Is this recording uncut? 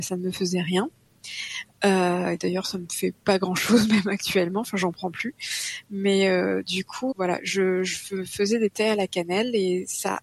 no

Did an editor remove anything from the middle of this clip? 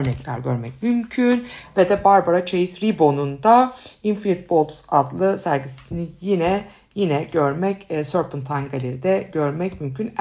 no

